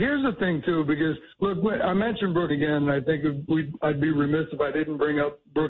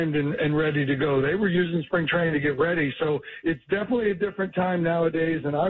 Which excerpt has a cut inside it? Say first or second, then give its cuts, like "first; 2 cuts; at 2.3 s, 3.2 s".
first; 2 cuts; at 1.3 s, 2.5 s